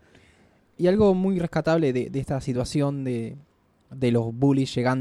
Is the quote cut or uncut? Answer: uncut